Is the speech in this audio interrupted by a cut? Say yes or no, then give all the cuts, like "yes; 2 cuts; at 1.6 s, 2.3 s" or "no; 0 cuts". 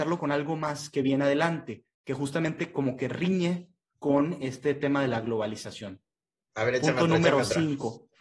no; 0 cuts